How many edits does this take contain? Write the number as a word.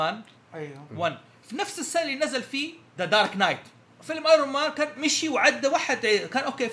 zero